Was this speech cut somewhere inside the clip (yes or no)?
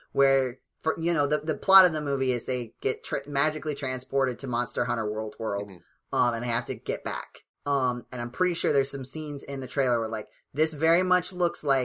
yes